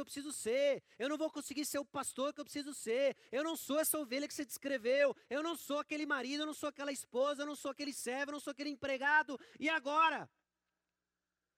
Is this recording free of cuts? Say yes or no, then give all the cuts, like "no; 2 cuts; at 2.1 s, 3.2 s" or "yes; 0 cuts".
yes; 0 cuts